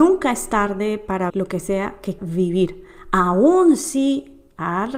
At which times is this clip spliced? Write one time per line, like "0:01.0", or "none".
0:01.3
0:02.2